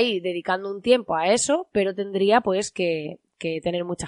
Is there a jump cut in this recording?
no; 0 cuts

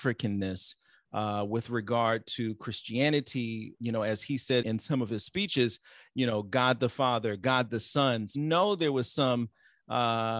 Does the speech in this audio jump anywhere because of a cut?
yes; 3 cuts; at 3.8 s, 4.6 s, 8.3 s

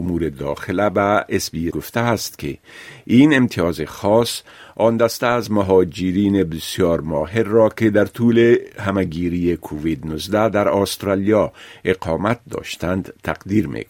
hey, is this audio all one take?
no; 1 cut; at 1.7 s

